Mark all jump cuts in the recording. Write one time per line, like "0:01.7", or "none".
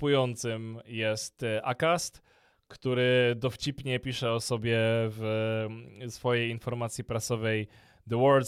none